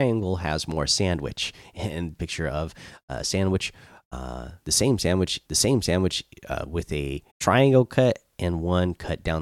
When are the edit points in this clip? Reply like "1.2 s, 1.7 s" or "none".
2.2 s, 5.4 s, 7.3 s